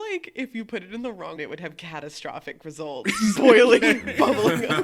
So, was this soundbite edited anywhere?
yes; 2 cuts; at 1.4 s, 3.3 s

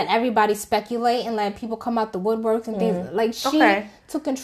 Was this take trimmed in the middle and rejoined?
no; 0 cuts

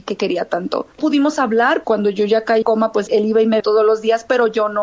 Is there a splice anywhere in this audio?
yes; 5 cuts; at 1.0 s, 1.8 s, 2.6 s, 3.1 s, 3.6 s

